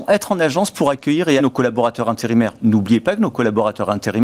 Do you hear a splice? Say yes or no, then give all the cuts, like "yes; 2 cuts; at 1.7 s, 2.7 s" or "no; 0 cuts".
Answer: yes; 1 cut; at 1.4 s